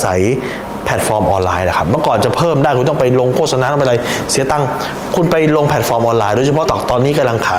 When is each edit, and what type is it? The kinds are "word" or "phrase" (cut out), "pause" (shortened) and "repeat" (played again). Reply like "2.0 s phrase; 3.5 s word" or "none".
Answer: 6.7 s word